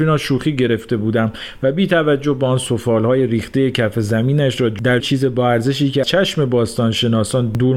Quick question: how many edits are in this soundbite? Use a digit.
2